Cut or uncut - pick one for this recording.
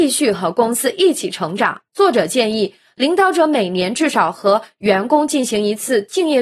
cut